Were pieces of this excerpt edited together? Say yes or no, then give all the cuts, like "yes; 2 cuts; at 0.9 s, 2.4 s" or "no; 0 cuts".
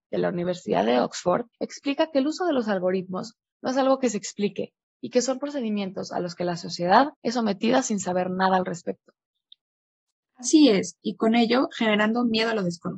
yes; 2 cuts; at 1.5 s, 7.2 s